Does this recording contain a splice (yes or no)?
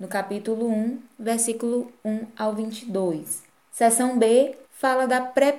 yes